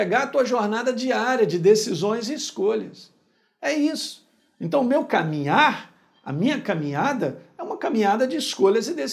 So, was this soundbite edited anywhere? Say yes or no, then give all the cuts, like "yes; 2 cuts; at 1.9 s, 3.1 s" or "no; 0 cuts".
no; 0 cuts